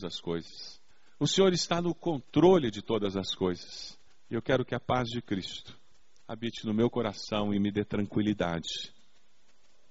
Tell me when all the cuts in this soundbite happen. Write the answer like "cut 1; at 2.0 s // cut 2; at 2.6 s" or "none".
cut 1; at 0.9 s // cut 2; at 4.1 s // cut 3; at 5.9 s